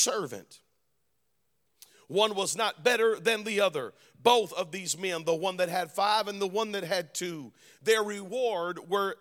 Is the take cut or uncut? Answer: uncut